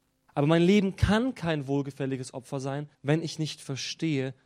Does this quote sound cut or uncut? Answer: cut